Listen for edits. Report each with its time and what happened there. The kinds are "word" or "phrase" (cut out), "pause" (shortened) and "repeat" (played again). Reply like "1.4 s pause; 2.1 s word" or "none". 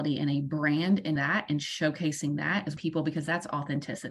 1.2 s word; 2.8 s word

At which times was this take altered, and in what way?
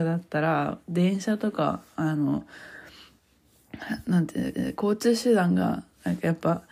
4.5 s repeat

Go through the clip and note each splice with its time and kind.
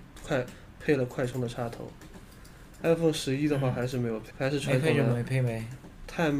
4.3 s word

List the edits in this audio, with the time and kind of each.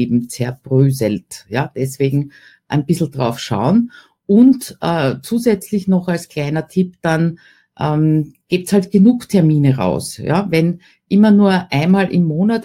none

